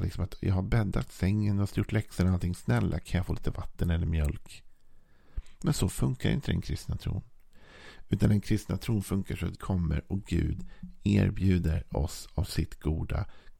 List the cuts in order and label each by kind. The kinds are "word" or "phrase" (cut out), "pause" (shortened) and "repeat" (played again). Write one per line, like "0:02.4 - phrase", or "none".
0:01.7 - word
0:09.5 - word